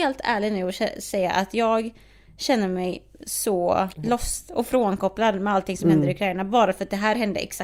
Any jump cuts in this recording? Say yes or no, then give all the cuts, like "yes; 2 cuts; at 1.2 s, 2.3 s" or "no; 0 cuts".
yes; 1 cut; at 3.9 s